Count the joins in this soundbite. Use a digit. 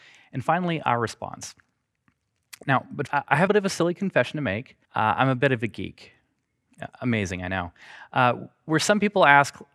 3